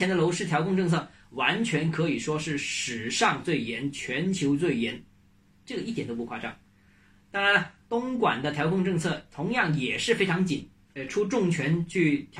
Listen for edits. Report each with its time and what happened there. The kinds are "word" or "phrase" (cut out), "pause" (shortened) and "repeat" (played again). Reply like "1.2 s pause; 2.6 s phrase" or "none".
10.9 s word